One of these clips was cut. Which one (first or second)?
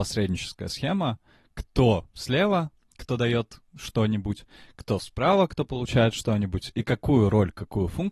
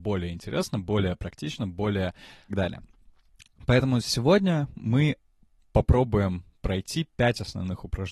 second